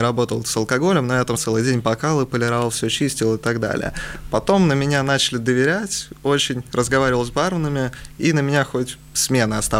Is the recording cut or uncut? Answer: cut